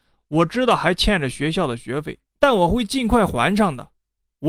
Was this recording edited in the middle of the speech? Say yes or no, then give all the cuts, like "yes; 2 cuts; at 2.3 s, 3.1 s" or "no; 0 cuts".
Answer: yes; 1 cut; at 2.3 s